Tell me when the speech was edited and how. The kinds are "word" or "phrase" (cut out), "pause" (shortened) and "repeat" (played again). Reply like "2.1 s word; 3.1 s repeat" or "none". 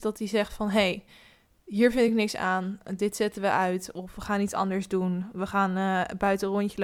none